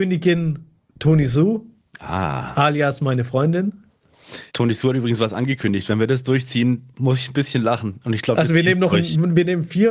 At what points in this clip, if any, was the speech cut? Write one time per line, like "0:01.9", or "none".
0:04.5
0:06.9